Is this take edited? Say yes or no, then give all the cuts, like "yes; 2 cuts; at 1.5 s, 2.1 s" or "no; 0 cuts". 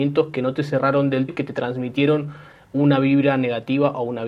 yes; 1 cut; at 1.3 s